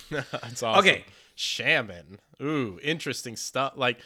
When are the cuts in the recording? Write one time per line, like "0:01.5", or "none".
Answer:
none